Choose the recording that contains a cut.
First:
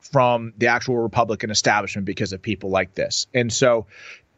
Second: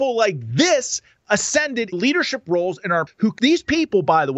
second; 3 cuts; at 1.9 s, 3.1 s, 3.4 s

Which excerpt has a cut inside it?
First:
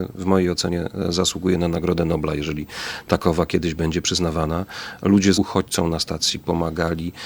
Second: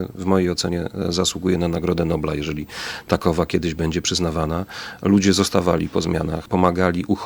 first; 1 cut; at 5.3 s

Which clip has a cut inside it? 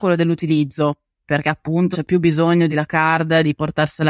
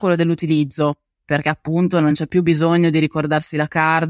first; 2 cuts; at 1.9 s, 2.7 s

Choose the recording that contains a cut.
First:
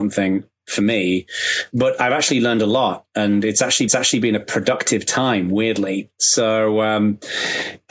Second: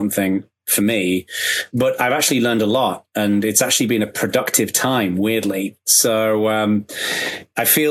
first; 1 cut; at 3.9 s

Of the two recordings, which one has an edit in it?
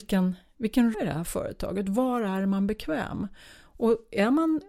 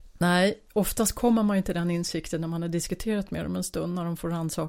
first; 1 cut; at 0.9 s

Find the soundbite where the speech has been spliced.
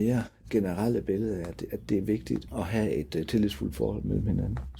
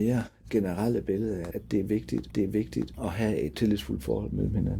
second; 3 cuts; at 1.5 s, 2.3 s, 3.5 s

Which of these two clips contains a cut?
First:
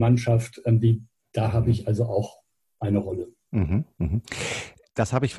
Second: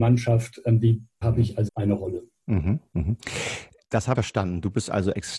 second; 3 cuts; at 1.2 s, 1.7 s, 4.2 s

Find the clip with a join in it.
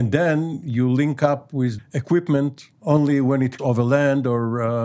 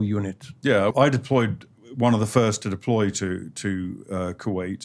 first; 3 cuts; at 1.8 s, 2.7 s, 3.6 s

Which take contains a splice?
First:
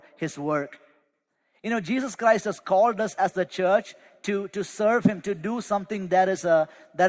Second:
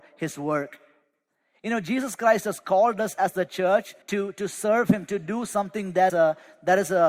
second; 2 cuts; at 4.0 s, 6.1 s

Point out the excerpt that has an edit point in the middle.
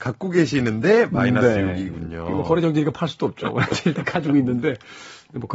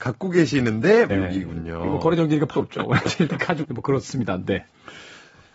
second; 3 cuts; at 1.1 s, 2.5 s, 3.6 s

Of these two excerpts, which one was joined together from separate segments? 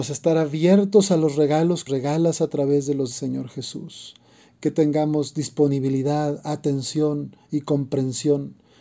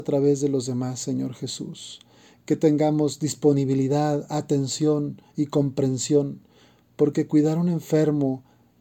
first; 2 cuts; at 1.9 s, 3.1 s

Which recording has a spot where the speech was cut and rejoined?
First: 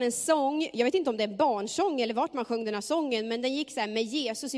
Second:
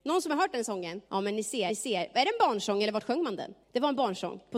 second; 3 cuts; at 1.1 s, 1.7 s, 3.6 s

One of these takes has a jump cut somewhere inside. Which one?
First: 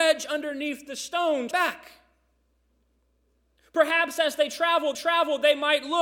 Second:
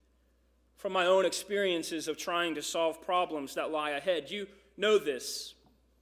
first; 2 cuts; at 1.5 s, 4.9 s

